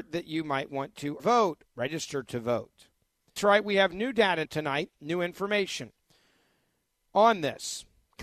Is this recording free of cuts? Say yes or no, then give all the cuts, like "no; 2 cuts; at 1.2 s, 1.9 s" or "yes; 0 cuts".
no; 4 cuts; at 1.2 s, 1.7 s, 3.4 s, 4.5 s